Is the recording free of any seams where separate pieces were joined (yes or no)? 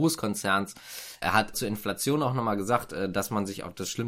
no